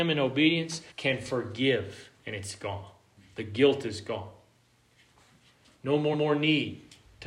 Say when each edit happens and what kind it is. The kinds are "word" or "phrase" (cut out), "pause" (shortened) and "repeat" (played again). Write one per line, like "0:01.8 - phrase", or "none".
0:00.9 - pause
0:02.2 - pause
0:03.2 - pause
0:06.1 - repeat